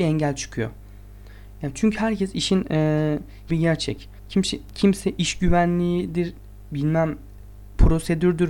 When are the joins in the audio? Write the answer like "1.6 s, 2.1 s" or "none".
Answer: 3.5 s, 4.2 s